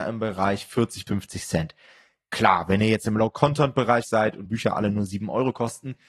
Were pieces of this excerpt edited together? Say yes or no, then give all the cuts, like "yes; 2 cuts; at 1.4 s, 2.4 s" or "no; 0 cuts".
yes; 3 cuts; at 1.1 s, 4.0 s, 4.5 s